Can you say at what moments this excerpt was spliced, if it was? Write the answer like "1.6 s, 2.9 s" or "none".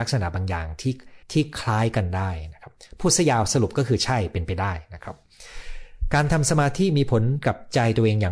1.2 s